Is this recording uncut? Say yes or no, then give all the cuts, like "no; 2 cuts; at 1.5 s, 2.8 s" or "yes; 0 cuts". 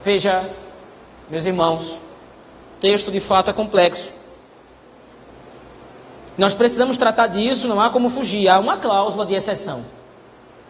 yes; 0 cuts